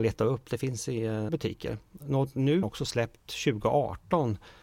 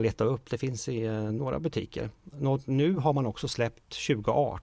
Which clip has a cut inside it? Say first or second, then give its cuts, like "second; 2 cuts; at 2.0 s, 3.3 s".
first; 2 cuts; at 1.3 s, 2.6 s